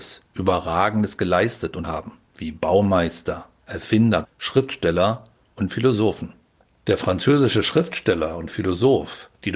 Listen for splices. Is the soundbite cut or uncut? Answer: cut